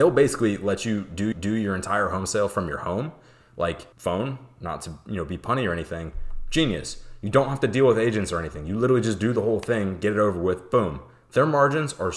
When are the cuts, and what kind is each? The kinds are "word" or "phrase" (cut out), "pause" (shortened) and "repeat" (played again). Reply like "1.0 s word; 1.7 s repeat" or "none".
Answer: 1.3 s repeat; 3.9 s pause